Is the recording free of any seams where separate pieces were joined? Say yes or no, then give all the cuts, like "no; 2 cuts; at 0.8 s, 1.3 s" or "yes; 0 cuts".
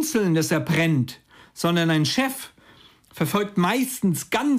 yes; 0 cuts